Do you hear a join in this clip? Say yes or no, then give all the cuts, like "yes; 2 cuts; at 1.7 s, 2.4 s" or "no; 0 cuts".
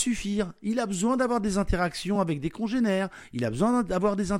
no; 0 cuts